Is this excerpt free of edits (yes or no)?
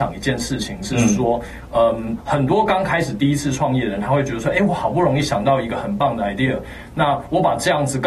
yes